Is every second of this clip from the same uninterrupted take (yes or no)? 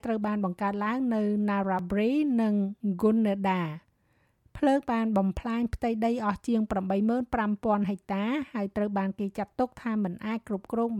yes